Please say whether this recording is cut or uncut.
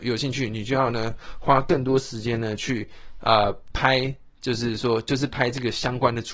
uncut